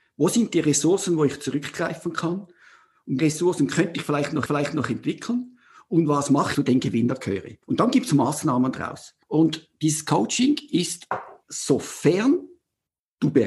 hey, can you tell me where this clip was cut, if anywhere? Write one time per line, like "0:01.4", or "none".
0:03.2
0:04.5
0:06.5
0:07.6
0:09.2
0:11.4